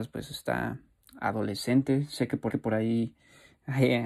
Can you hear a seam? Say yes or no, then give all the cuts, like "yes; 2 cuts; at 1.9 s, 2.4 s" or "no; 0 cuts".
yes; 1 cut; at 2.5 s